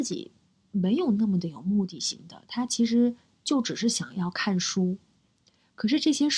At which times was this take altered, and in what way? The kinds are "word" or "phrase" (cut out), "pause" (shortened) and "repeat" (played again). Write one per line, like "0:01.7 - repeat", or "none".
none